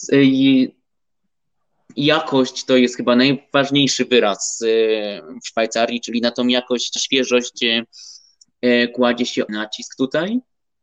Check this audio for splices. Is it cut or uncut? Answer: cut